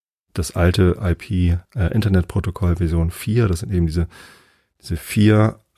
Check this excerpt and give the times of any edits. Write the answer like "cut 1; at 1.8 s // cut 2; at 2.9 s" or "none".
cut 1; at 1.6 s